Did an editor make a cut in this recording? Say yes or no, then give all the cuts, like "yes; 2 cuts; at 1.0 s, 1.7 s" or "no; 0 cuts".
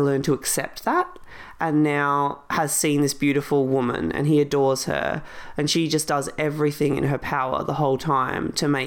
no; 0 cuts